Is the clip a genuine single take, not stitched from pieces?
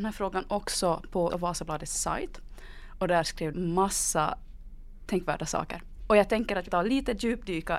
no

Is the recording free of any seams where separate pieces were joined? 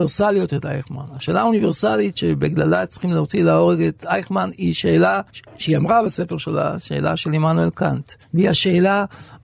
no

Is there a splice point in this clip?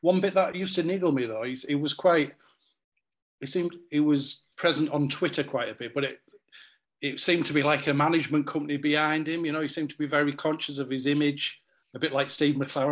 yes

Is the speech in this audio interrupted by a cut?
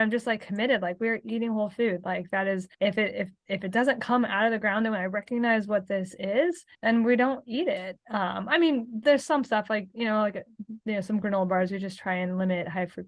yes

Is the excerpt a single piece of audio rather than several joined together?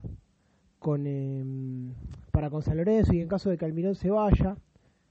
yes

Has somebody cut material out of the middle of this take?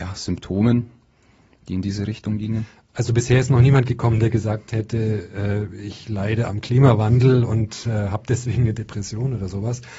no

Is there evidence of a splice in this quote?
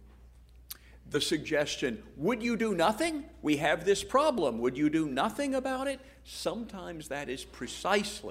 no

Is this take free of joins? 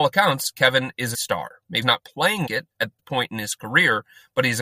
no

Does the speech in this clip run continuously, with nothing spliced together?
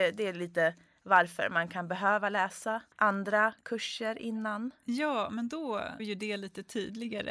no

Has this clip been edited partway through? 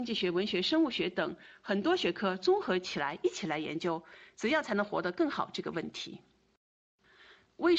no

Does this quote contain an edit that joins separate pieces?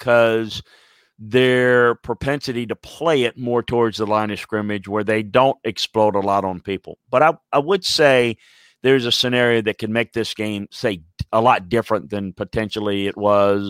no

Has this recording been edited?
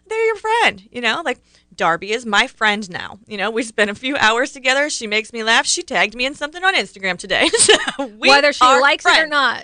no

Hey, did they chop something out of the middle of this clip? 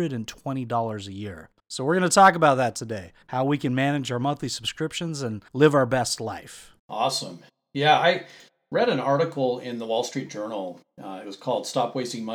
yes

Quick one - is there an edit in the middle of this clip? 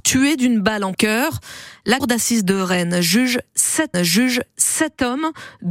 yes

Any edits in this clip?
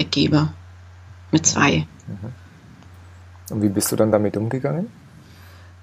no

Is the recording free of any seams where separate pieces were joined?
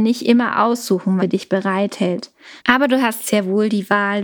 no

